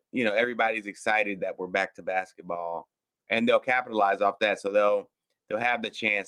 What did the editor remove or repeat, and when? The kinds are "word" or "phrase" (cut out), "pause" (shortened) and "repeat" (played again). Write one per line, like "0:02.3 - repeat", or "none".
none